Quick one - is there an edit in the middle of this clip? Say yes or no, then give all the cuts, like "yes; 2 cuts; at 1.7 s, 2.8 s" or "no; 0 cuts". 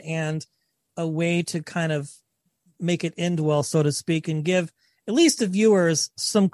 no; 0 cuts